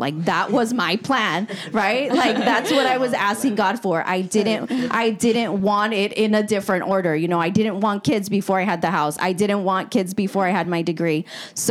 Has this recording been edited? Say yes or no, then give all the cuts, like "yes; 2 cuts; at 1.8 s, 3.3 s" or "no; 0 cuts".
no; 0 cuts